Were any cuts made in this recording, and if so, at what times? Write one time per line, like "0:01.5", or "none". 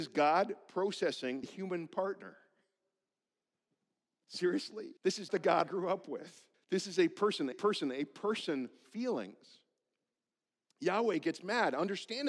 0:01.4
0:05.0
0:05.3
0:05.6
0:06.5
0:07.5
0:08.8

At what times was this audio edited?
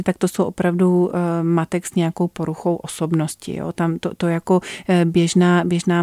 none

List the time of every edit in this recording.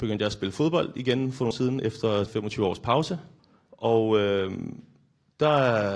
0:01.5
0:02.3
0:03.4

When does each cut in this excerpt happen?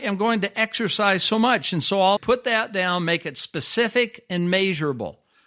0:02.2

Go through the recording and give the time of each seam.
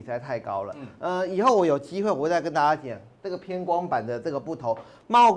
none

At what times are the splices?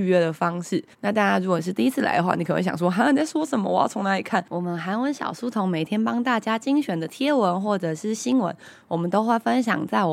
0:00.9

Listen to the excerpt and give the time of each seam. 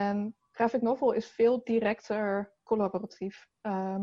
none

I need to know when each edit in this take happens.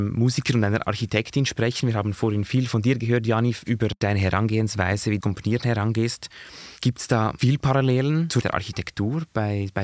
0:05.2
0:06.8
0:08.4

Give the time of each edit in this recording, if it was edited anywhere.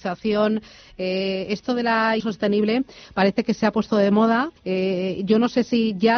0:02.2
0:04.6

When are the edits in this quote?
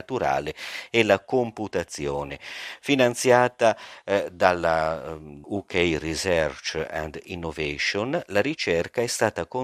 0:05.4

